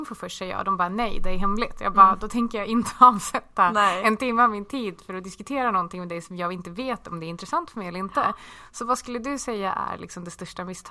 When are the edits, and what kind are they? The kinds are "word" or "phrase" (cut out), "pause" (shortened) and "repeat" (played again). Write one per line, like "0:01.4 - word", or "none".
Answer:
none